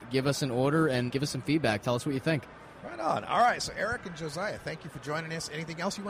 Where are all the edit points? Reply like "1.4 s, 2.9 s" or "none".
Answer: none

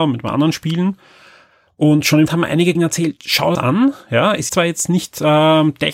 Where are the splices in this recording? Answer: 2.3 s, 2.8 s, 3.6 s, 4.5 s

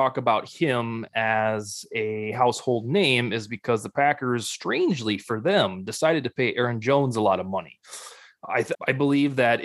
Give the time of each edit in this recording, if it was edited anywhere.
8.7 s

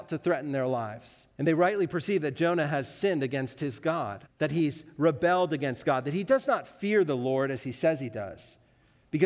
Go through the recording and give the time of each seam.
1.3 s, 4.3 s

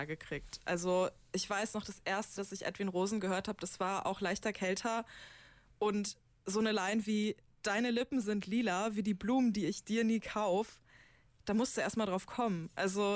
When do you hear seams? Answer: 2.4 s

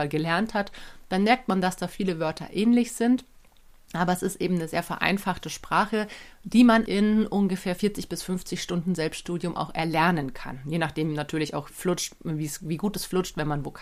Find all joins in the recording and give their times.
6.9 s, 11.7 s

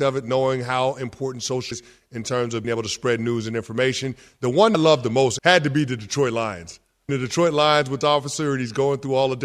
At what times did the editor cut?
1.7 s, 2.6 s, 4.7 s, 5.4 s, 7.1 s, 8.0 s

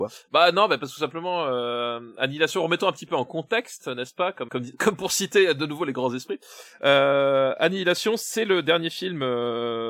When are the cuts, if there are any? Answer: 4.5 s

